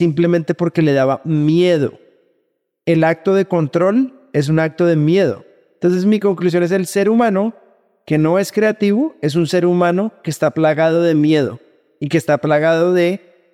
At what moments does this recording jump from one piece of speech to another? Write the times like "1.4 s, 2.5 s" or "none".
none